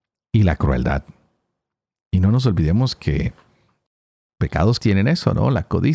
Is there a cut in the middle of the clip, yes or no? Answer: yes